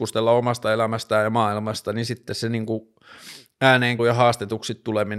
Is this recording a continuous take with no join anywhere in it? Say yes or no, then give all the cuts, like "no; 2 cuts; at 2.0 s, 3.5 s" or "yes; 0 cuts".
no; 1 cut; at 4.0 s